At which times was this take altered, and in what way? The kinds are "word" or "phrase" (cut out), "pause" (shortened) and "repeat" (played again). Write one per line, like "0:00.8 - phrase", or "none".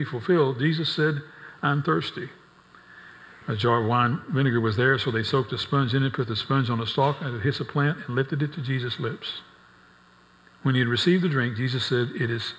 none